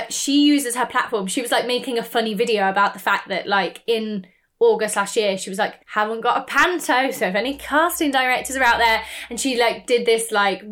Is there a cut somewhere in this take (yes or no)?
yes